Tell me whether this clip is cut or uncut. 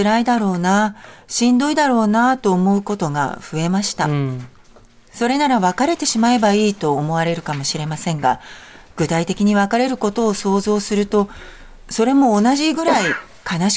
uncut